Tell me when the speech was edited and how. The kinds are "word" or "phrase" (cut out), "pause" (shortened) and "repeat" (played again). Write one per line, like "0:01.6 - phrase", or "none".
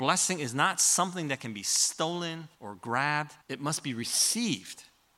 0:02.5 - pause
0:03.4 - pause